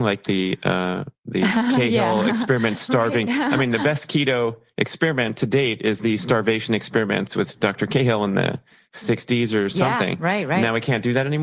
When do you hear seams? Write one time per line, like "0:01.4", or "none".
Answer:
none